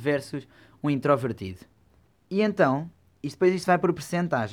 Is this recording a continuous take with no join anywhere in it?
no; 1 cut; at 2.1 s

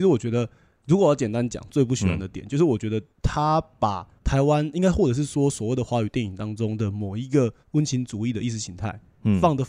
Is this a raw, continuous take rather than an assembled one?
yes; 0 cuts

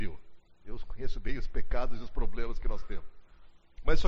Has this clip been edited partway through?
no; 0 cuts

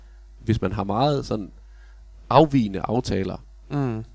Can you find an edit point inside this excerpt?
no; 0 cuts

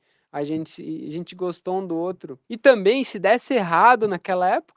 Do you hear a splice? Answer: yes; 1 cut; at 2.4 s

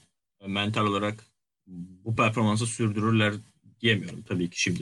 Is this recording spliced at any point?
no; 0 cuts

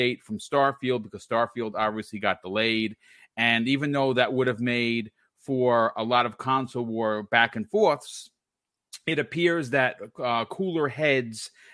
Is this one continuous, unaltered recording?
yes; 0 cuts

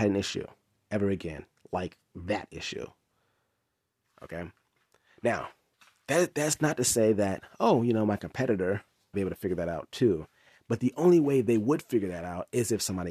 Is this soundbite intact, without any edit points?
no; 2 cuts; at 5.7 s, 9.1 s

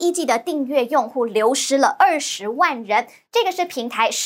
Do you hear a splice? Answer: no; 0 cuts

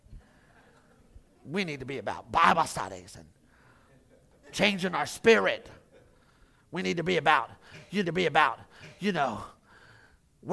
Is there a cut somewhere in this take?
yes; 1 cut; at 8.0 s

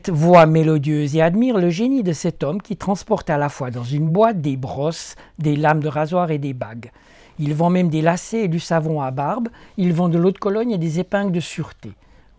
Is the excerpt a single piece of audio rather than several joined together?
yes; 0 cuts

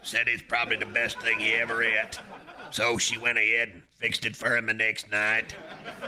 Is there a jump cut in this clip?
no; 0 cuts

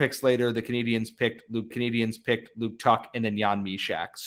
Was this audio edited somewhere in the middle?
yes; 1 cut; at 1.7 s

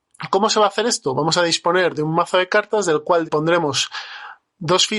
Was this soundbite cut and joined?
yes; 1 cut; at 3.2 s

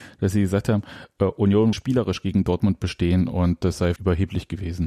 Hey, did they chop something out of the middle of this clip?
yes; 2 cuts; at 1.7 s, 4.0 s

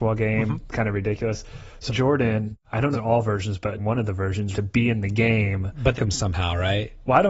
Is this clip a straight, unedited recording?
no; 5 cuts; at 1.9 s, 2.9 s, 3.8 s, 4.5 s, 6.0 s

